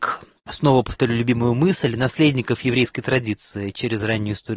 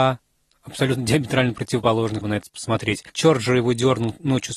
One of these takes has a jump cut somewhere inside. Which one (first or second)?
second